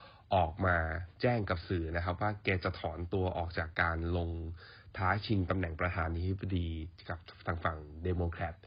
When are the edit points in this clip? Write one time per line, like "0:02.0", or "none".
0:01.1